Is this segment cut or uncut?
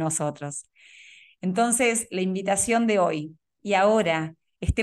cut